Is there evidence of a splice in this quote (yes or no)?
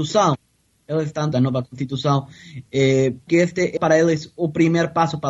yes